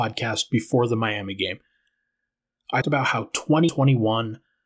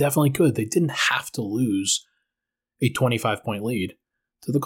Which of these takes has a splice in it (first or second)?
first